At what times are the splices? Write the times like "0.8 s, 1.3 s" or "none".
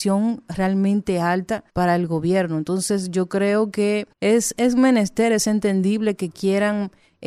1.7 s, 4.1 s